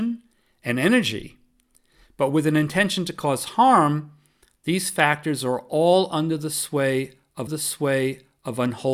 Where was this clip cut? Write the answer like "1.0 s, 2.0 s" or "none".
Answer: 7.5 s